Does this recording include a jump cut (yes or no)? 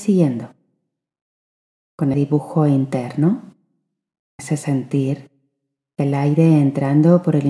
yes